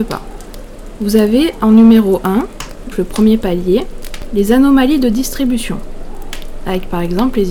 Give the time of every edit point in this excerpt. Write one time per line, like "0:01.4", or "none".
0:02.9